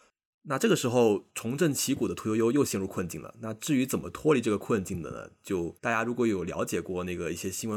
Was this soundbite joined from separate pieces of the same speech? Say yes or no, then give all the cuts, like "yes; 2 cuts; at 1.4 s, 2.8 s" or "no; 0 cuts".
yes; 2 cuts; at 1.3 s, 5.8 s